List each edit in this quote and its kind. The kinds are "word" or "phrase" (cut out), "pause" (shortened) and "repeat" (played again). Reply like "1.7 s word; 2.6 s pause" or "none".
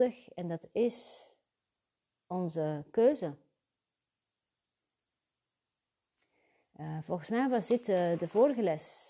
none